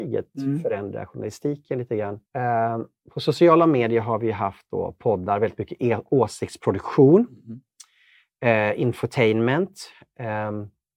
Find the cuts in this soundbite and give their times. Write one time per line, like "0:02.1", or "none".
0:02.3

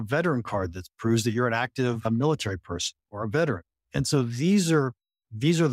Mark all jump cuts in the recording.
0:03.0

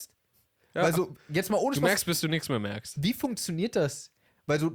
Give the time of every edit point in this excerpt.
none

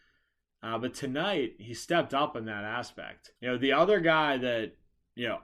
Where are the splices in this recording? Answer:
0:03.4

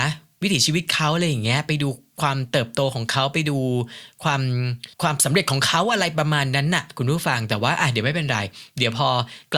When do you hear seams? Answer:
0:04.9

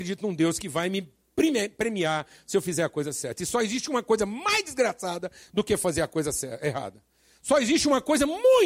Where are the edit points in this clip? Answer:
none

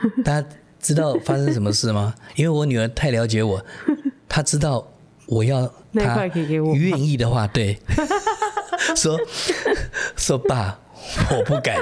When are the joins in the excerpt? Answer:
none

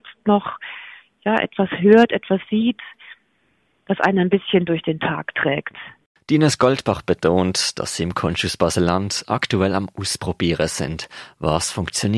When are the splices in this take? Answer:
none

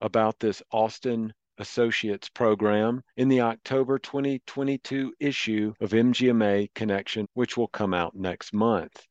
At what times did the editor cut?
0:03.1
0:05.8
0:07.2

